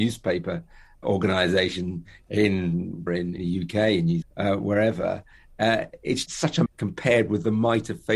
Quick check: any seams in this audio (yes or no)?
yes